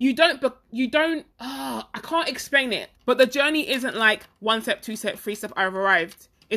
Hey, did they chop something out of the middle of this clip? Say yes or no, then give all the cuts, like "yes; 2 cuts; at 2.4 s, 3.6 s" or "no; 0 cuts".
yes; 2 cuts; at 1.3 s, 3.0 s